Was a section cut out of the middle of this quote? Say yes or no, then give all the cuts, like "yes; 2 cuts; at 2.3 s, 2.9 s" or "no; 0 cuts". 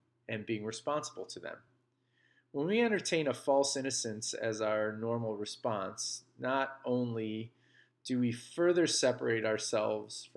no; 0 cuts